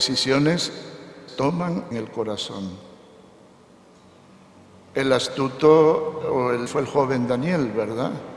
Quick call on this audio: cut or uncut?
cut